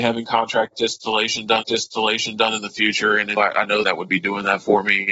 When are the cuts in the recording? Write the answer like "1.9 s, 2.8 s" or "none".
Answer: 1.6 s, 3.4 s, 3.8 s